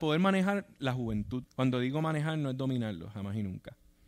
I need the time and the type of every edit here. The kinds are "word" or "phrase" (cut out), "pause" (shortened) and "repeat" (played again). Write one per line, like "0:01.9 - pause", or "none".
0:01.5 - pause